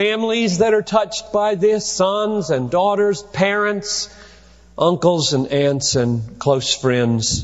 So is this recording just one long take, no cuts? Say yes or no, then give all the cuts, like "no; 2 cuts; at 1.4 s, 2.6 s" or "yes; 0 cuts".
yes; 0 cuts